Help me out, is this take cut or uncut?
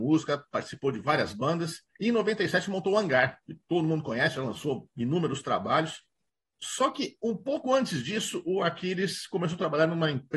cut